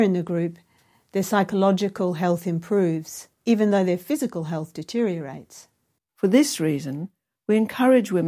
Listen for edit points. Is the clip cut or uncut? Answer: uncut